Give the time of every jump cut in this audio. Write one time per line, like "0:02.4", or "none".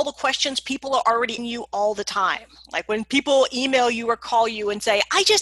0:01.4